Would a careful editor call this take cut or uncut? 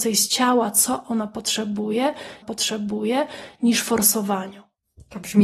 cut